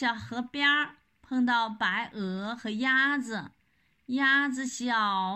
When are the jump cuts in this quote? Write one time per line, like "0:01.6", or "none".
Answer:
none